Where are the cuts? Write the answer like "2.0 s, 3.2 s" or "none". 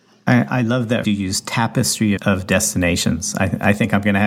1.0 s, 2.2 s